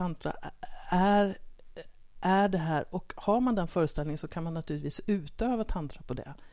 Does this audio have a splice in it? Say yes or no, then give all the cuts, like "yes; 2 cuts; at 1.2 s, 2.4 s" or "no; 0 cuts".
no; 0 cuts